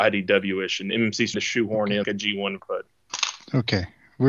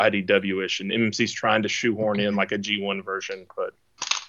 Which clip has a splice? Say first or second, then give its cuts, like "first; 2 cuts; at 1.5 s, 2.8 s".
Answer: first; 3 cuts; at 1.3 s, 2.0 s, 2.6 s